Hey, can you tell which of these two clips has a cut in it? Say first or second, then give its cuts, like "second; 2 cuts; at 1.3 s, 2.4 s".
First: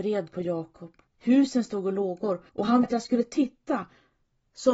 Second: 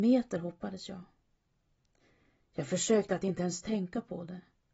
first; 3 cuts; at 1.1 s, 2.5 s, 2.8 s